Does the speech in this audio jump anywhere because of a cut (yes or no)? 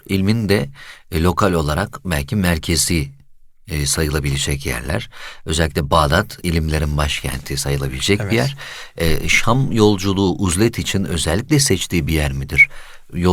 no